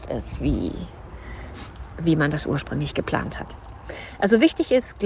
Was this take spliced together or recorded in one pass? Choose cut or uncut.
uncut